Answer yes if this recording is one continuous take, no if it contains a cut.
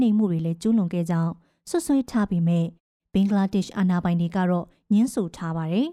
yes